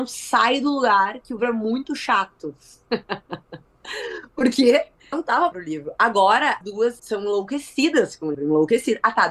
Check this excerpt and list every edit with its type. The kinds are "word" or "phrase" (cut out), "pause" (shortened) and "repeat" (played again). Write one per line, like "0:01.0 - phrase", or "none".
0:01.4 - word
0:05.1 - word
0:05.5 - word
0:06.6 - word
0:07.0 - word
0:08.3 - word